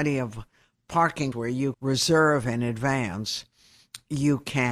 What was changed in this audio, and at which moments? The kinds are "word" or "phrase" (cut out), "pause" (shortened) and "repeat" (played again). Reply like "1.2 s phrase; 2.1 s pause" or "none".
1.3 s word; 1.7 s word

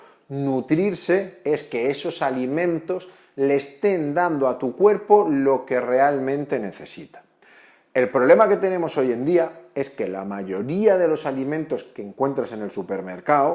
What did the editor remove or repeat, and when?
none

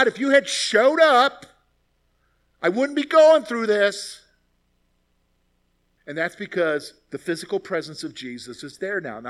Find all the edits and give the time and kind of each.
none

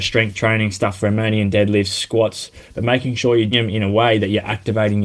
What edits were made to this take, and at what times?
1.0 s word; 3.5 s word

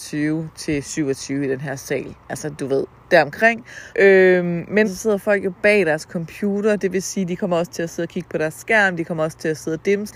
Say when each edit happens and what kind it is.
3.9 s pause; 4.8 s phrase

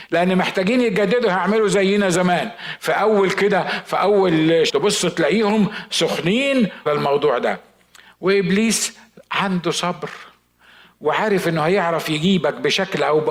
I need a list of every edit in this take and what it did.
4.7 s word; 6.9 s phrase

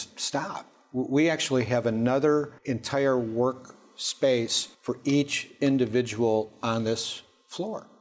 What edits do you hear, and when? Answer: 2.6 s pause; 4.7 s pause

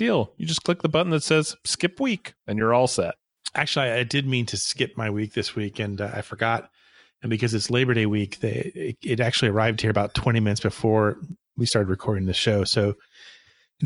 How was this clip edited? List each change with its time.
none

